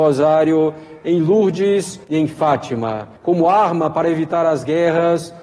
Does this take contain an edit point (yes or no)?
yes